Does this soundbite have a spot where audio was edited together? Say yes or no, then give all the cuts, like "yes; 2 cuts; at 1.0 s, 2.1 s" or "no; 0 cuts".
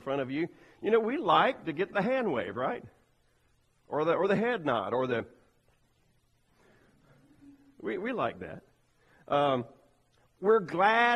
no; 0 cuts